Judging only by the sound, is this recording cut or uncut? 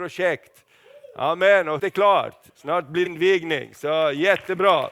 cut